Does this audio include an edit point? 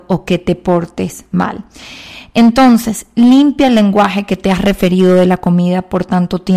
no; 0 cuts

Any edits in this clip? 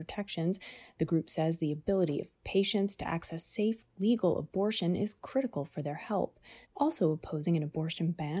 yes; 1 cut; at 6.6 s

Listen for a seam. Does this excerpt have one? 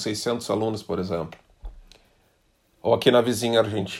no; 0 cuts

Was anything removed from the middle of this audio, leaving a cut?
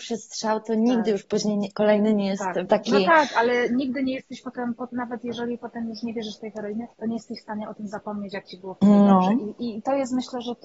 yes; 2 cuts; at 2.7 s, 6.9 s

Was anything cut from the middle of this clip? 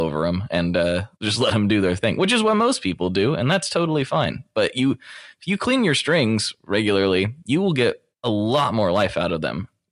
yes; 2 cuts; at 1.1 s, 8.1 s

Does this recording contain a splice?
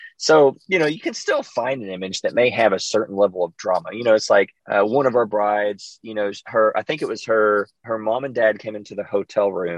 yes; 2 cuts; at 4.6 s, 7.8 s

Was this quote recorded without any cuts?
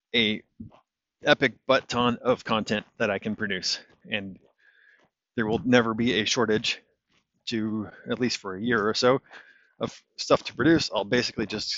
yes; 0 cuts

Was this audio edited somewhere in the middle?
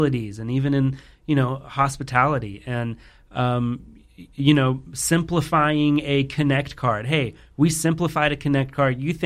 no; 0 cuts

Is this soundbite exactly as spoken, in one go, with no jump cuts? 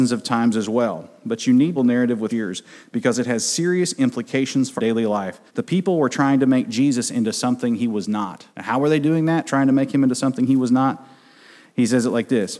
no; 5 cuts; at 1.8 s, 2.3 s, 4.8 s, 5.5 s, 8.5 s

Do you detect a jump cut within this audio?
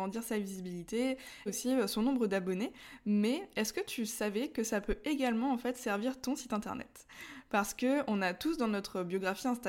yes; 1 cut; at 1.5 s

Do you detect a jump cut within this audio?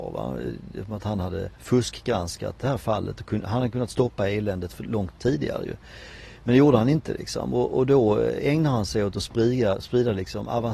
yes; 1 cut; at 1.6 s

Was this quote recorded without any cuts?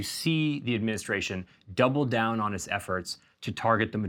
yes; 0 cuts

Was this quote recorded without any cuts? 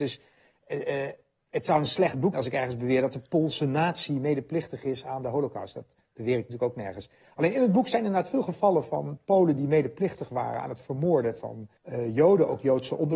no; 2 cuts; at 2.3 s, 11.8 s

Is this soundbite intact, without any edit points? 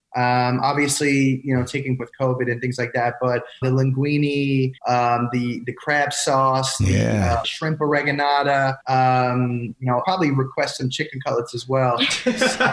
no; 6 cuts; at 2.0 s, 3.6 s, 4.8 s, 7.4 s, 8.8 s, 10.0 s

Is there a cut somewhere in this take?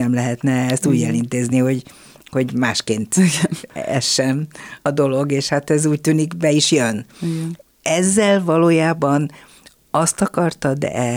no; 0 cuts

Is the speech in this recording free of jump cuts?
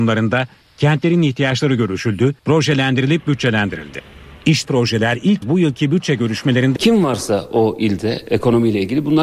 no; 4 cuts; at 2.4 s, 4.6 s, 5.4 s, 6.8 s

